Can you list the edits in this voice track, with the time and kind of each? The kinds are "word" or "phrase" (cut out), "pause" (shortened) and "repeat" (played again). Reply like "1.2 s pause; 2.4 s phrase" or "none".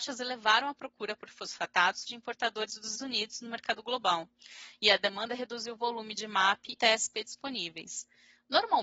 2.1 s phrase; 2.9 s word; 6.8 s word

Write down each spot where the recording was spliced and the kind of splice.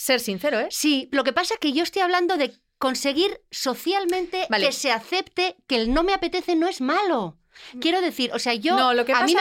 none

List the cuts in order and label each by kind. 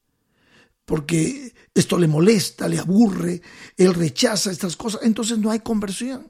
none

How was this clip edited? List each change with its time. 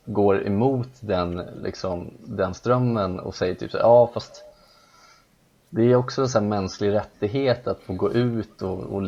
none

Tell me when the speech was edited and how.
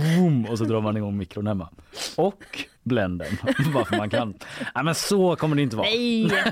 2.8 s pause

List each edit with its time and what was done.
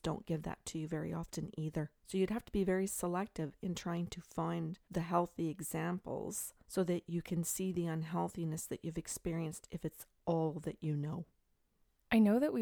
2.0 s pause; 4.8 s pause; 6.6 s pause

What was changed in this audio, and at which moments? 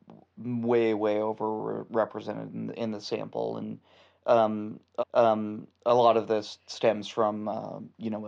2.7 s word; 5.0 s repeat

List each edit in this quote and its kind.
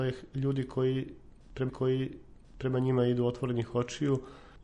1.7 s repeat

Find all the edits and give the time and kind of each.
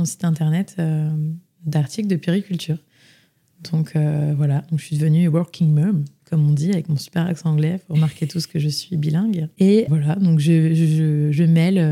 9.9 s word

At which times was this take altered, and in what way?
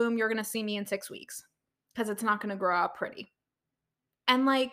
none

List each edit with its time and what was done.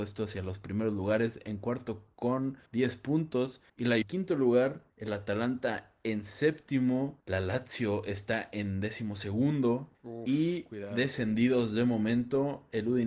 2.7 s pause; 3.7 s pause; 4.0 s phrase; 4.9 s pause; 7.2 s pause; 9.9 s pause

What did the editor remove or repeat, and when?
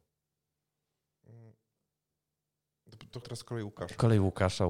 3.2 s word

